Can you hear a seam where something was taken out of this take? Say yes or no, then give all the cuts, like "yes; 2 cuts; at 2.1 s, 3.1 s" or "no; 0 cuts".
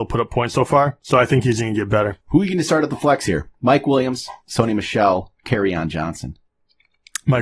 yes; 3 cuts; at 2.2 s, 4.4 s, 5.4 s